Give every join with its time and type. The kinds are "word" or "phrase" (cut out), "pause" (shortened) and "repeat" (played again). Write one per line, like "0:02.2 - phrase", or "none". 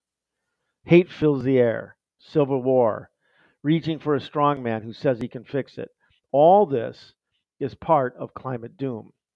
0:02.2 - word